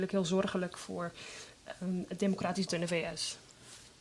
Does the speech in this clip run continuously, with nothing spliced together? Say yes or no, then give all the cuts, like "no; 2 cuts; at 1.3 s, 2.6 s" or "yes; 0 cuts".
no; 1 cut; at 2.7 s